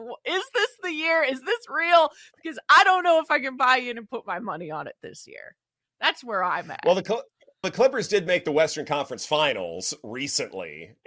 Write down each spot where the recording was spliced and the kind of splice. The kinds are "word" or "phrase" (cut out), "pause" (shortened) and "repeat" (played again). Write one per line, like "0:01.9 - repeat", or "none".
0:07.6 - word

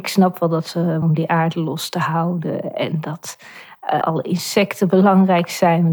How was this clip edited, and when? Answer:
0:01.0 - phrase
0:04.0 - word

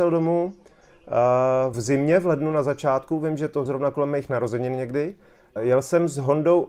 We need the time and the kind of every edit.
0:01.7 - word
0:03.7 - word
0:05.6 - word

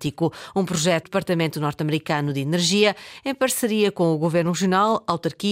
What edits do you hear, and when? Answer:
0:01.0 - word

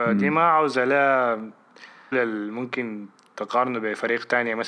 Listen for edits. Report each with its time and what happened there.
0:02.1 - word

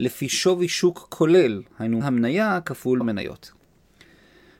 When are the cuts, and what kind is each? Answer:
0:02.0 - word
0:03.0 - word

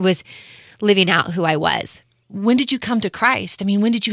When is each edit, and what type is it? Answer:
none

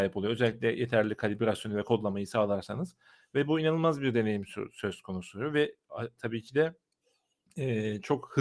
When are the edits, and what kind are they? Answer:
none

